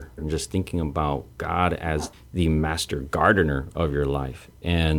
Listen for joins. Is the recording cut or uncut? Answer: uncut